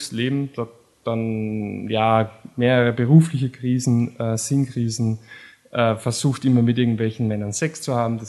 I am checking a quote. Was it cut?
no; 0 cuts

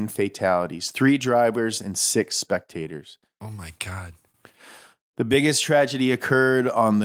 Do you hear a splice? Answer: no; 0 cuts

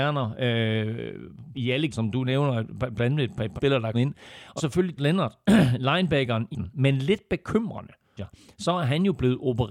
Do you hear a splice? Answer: yes; 8 cuts; at 1.5 s, 1.9 s, 3.6 s, 3.9 s, 4.6 s, 5.0 s, 6.5 s, 8.2 s

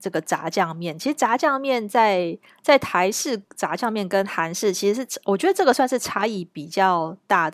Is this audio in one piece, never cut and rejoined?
yes; 0 cuts

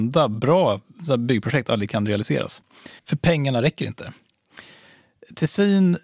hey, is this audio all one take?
no; 1 cut; at 3.0 s

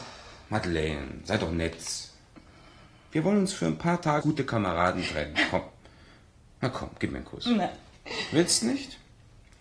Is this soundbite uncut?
no; 1 cut; at 4.2 s

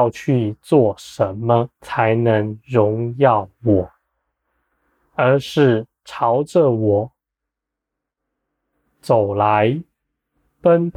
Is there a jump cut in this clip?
yes; 1 cut; at 1.7 s

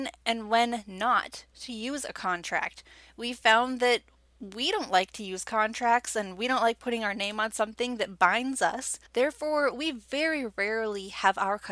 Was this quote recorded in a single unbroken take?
no; 1 cut; at 9.1 s

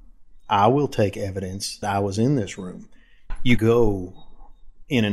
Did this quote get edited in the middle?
yes; 2 cuts; at 1.8 s, 3.6 s

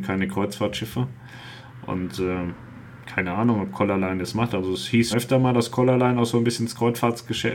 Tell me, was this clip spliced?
yes; 1 cut; at 5.1 s

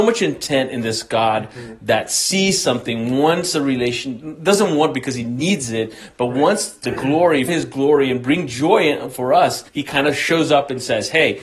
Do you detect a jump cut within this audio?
yes; 3 cuts; at 6.8 s, 7.5 s, 9.7 s

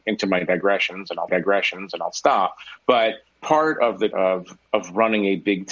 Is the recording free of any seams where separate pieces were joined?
no; 4 cuts; at 1.3 s, 3.3 s, 4.1 s, 4.7 s

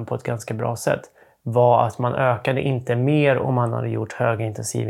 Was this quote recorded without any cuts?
yes; 0 cuts

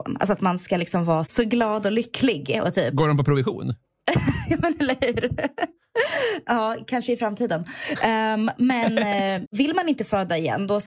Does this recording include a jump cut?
yes; 2 cuts; at 1.3 s, 9.4 s

